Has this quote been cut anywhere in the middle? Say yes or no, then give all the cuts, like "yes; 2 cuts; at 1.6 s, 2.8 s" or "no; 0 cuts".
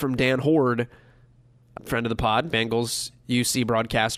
yes; 2 cuts; at 1.8 s, 2.5 s